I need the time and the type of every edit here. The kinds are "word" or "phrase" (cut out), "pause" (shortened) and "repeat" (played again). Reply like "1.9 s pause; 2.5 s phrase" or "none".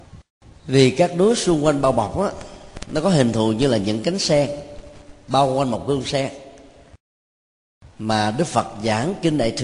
none